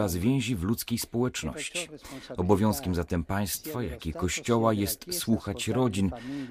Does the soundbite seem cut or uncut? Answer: uncut